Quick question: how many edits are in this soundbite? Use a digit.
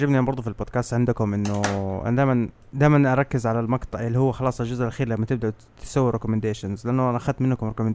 0